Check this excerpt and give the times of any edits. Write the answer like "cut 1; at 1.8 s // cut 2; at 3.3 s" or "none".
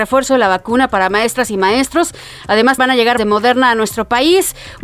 cut 1; at 2.8 s // cut 2; at 3.2 s